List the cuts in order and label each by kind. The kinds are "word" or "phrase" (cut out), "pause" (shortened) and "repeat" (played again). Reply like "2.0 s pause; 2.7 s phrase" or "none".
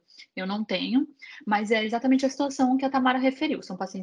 none